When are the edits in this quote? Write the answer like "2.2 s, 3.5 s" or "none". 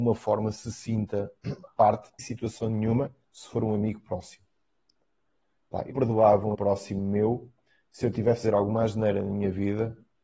1.7 s, 2.2 s, 3.2 s, 5.9 s, 6.5 s, 8.4 s

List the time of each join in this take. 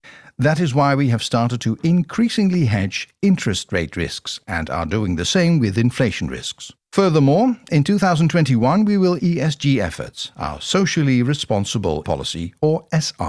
6.8 s, 9.2 s, 12.0 s

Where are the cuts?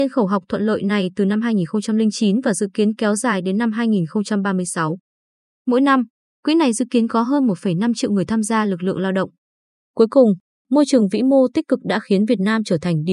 none

